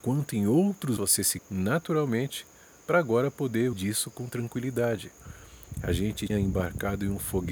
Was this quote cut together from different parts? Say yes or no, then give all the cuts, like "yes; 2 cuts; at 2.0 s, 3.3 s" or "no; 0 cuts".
yes; 4 cuts; at 1.0 s, 1.4 s, 3.7 s, 6.3 s